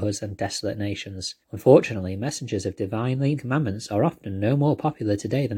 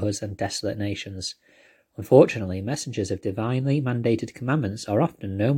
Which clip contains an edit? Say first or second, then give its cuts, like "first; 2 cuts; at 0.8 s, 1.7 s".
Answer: first; 2 cuts; at 1.4 s, 3.4 s